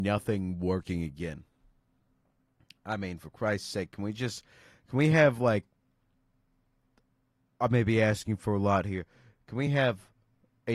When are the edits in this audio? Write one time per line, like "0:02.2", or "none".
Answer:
none